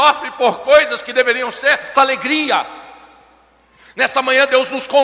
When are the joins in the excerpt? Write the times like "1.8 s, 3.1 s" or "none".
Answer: 1.9 s